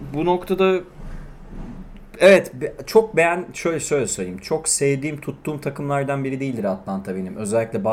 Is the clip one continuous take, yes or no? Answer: yes